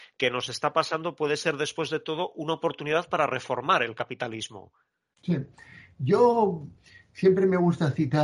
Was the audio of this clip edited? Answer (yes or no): no